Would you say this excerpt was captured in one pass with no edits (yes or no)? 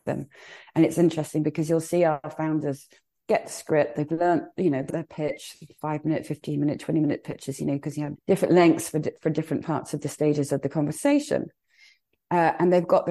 no